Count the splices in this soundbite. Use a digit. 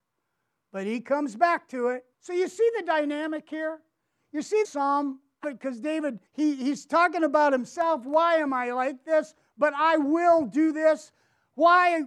4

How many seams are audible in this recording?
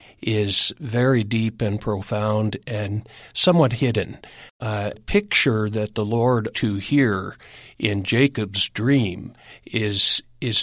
2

